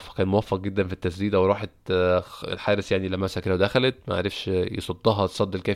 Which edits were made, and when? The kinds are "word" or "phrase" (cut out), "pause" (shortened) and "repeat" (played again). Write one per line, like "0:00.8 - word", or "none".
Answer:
none